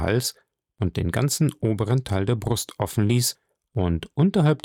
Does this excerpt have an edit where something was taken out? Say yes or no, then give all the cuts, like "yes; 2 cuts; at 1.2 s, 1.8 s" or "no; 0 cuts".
no; 0 cuts